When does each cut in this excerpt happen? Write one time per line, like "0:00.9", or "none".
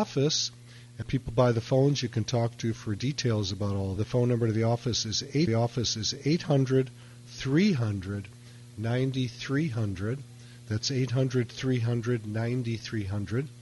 0:01.0
0:04.0
0:05.5